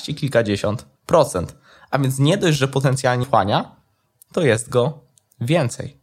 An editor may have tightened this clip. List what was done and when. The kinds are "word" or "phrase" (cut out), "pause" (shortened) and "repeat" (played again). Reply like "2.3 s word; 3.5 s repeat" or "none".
1.0 s pause; 3.2 s phrase